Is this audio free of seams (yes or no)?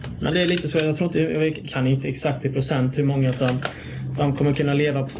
yes